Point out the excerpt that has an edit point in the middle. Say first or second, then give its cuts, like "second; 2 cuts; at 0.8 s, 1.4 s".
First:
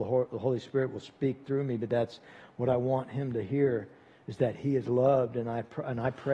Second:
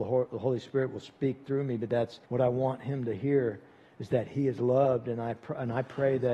second; 1 cut; at 2.2 s